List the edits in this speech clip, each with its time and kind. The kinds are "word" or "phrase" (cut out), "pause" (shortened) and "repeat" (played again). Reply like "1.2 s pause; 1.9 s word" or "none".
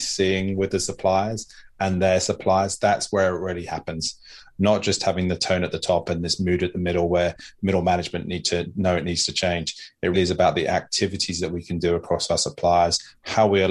10.1 s word